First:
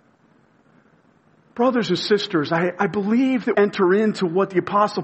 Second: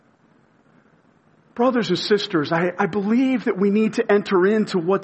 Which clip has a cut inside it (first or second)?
first